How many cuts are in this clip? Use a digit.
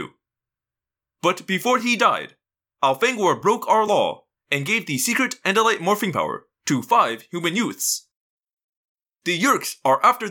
0